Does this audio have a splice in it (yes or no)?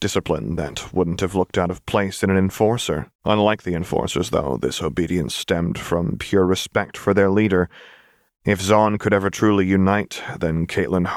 yes